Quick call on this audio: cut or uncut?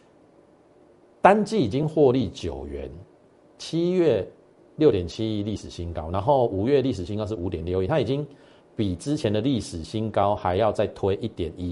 uncut